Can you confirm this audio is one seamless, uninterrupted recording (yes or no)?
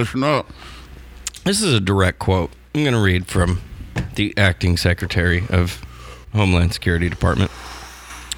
no